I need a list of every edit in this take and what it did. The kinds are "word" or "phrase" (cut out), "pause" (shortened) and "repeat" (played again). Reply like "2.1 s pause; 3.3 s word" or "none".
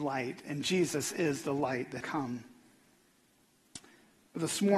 2.0 s word